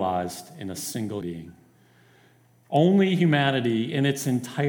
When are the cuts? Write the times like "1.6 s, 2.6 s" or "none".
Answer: 1.2 s